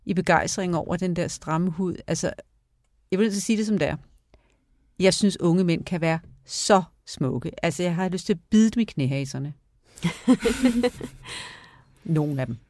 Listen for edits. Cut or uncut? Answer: uncut